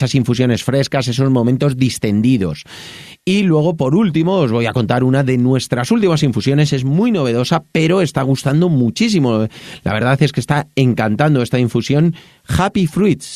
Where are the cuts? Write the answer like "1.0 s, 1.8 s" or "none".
none